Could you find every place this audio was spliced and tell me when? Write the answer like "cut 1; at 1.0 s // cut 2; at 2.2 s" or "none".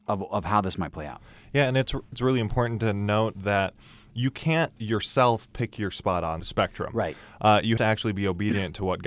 cut 1; at 2.1 s // cut 2; at 4.8 s // cut 3; at 6.4 s // cut 4; at 7.8 s